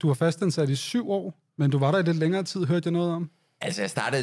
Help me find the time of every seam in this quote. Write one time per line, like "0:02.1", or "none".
0:01.5